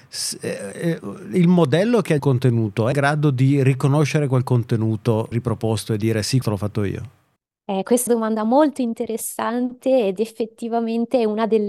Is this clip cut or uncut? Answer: cut